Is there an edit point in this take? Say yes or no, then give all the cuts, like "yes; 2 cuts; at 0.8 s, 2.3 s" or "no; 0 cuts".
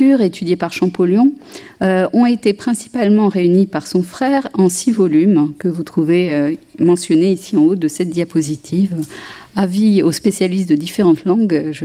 no; 0 cuts